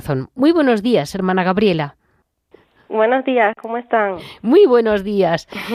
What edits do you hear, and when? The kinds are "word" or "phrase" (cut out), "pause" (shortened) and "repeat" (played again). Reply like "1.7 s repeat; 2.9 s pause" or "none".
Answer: none